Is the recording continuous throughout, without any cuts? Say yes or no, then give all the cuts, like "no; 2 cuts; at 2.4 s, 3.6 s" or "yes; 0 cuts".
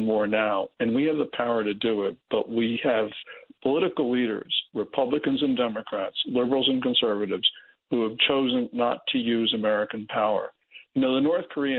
yes; 0 cuts